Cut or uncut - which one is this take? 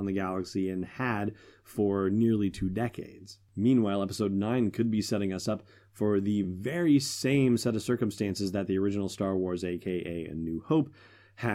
uncut